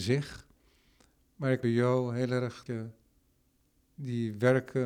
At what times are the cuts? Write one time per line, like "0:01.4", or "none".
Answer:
0:01.6
0:02.7

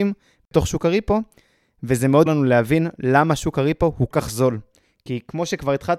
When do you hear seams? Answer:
0:02.3
0:04.1

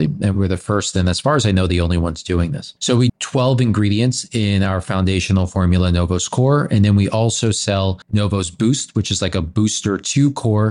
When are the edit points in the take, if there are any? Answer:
0:02.8
0:03.1
0:08.0

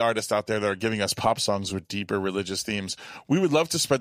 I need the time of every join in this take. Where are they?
none

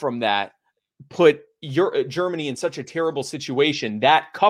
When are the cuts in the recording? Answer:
none

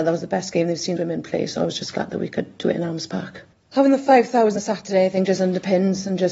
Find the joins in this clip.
0:01.0
0:04.6

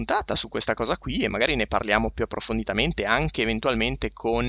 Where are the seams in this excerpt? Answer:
none

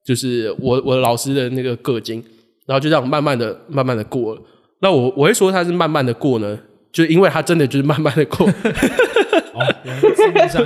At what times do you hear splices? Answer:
none

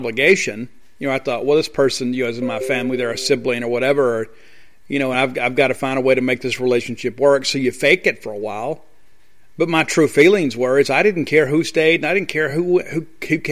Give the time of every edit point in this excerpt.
none

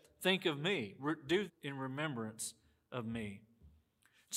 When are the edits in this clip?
0:01.5

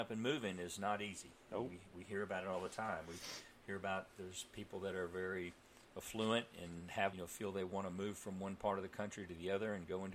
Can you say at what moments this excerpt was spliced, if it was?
0:07.1

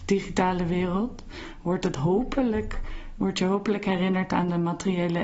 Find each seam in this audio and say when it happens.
none

